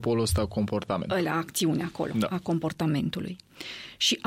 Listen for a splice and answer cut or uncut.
uncut